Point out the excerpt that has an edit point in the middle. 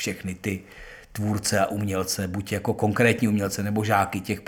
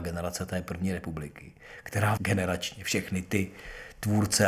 second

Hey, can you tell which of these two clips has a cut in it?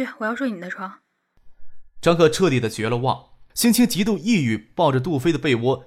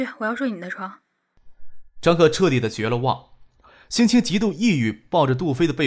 first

